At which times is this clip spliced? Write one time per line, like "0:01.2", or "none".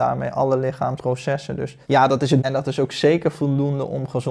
0:01.0
0:01.8
0:02.4

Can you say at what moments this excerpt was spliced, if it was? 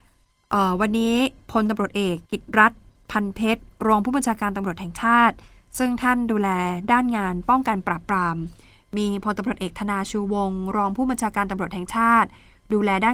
0:02.2

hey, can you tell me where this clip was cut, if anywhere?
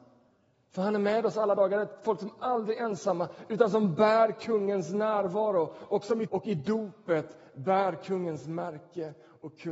0:06.3

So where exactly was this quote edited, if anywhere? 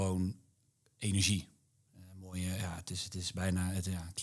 none

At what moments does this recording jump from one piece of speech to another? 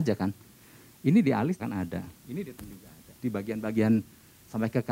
0:01.6
0:02.2
0:02.6
0:03.2

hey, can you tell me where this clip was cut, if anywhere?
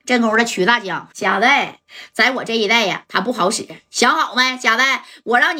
0:01.1

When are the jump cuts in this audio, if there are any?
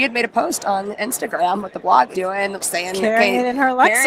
0:02.1
0:02.6

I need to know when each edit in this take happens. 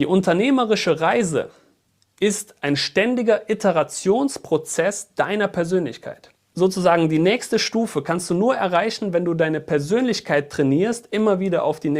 none

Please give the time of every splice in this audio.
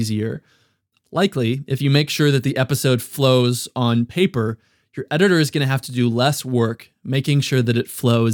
none

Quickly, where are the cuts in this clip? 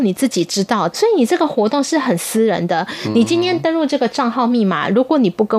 0:00.9

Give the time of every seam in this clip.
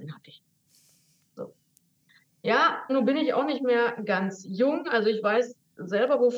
0:02.9

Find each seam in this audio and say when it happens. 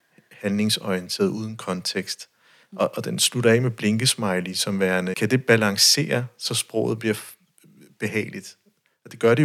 0:05.1

